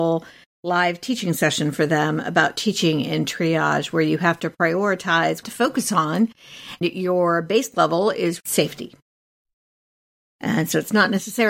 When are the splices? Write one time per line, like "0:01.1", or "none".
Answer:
0:05.4
0:06.8
0:08.4